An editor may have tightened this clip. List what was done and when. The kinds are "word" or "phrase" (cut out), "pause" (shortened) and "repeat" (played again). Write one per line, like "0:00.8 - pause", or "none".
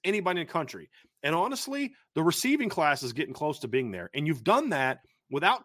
none